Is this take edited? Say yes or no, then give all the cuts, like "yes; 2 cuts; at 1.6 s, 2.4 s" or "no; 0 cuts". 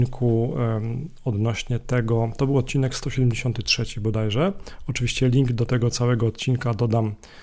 no; 0 cuts